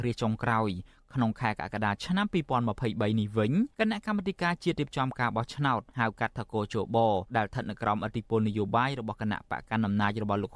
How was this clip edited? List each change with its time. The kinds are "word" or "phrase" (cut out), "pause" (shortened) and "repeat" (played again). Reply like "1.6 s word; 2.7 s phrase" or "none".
3.7 s pause; 5.9 s pause; 7.3 s pause

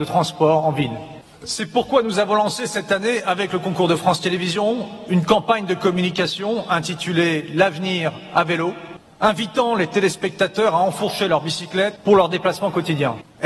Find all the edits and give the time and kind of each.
none

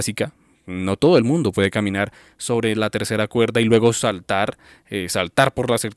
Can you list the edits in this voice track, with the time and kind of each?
none

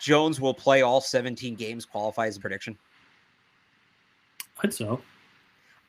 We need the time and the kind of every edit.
2.4 s word; 4.7 s word

